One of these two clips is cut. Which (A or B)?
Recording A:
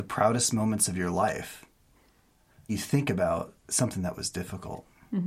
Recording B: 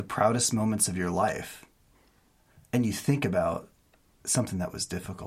A